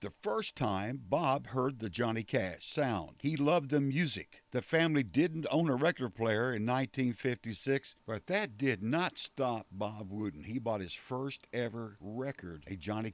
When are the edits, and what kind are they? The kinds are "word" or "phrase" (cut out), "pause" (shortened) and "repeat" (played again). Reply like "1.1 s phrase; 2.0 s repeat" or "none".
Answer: none

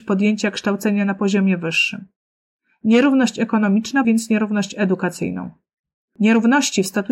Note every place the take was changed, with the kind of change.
4.0 s word

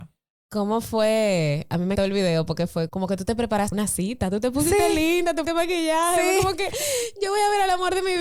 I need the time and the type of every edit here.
2.0 s word; 2.9 s word; 3.7 s word; 5.4 s word

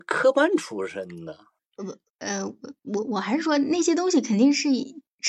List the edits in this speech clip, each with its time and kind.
1.6 s pause

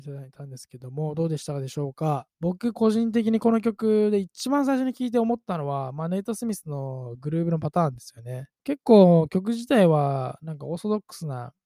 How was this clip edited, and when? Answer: 2.3 s pause; 8.5 s pause

